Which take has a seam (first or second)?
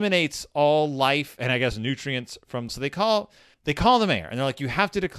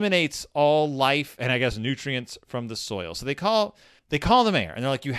first